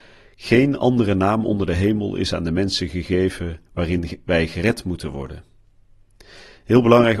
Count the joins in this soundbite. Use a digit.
1